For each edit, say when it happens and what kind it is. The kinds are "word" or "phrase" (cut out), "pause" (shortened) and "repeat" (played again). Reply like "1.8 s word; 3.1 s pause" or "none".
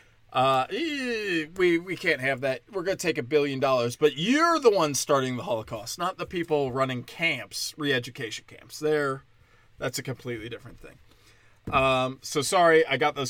none